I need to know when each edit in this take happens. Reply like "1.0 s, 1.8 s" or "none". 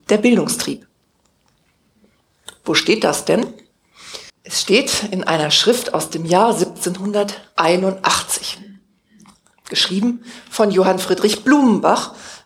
4.3 s